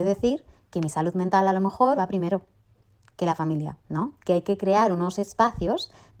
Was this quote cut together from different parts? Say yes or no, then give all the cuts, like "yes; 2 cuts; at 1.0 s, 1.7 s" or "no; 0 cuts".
yes; 1 cut; at 2.0 s